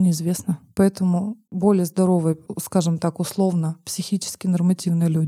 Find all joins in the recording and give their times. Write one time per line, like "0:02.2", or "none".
none